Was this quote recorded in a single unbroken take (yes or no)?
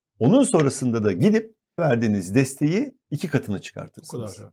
no